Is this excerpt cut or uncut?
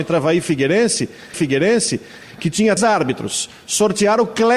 cut